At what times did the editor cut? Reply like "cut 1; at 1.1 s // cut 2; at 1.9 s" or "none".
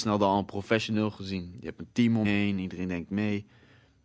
cut 1; at 2.2 s